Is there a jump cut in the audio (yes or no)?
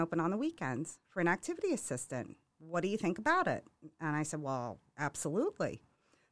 no